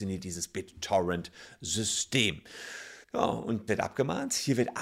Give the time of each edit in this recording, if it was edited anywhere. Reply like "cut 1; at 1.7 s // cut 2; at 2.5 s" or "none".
cut 1; at 3.0 s // cut 2; at 3.7 s